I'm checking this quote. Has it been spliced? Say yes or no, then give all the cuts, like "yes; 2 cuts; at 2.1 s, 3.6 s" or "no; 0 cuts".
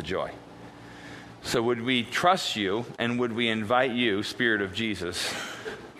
no; 0 cuts